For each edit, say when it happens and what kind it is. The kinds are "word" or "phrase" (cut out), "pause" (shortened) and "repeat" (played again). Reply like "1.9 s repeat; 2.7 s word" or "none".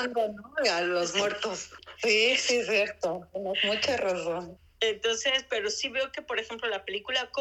none